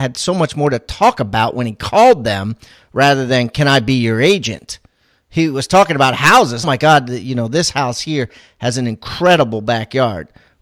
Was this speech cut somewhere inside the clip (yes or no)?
yes